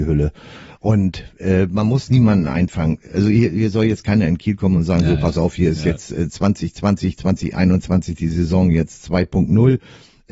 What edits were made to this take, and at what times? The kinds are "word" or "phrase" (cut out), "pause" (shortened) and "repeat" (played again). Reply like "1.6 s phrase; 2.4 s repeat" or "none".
none